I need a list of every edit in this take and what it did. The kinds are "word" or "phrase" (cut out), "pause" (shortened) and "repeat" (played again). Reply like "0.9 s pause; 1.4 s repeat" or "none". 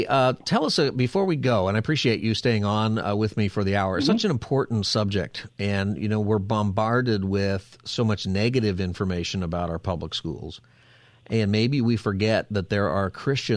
none